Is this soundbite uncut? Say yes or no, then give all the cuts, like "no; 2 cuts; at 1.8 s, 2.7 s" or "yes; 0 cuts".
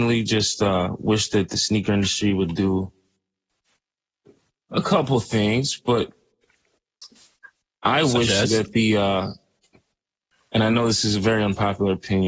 yes; 0 cuts